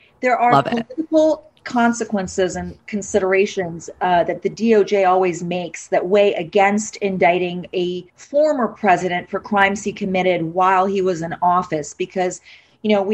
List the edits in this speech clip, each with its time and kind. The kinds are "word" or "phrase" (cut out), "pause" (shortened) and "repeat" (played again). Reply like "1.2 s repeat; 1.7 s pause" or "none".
8.1 s pause